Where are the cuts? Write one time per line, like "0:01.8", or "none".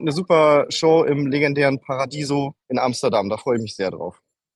0:02.6